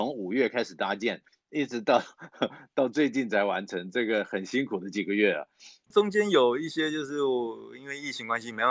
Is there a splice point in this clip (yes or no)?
yes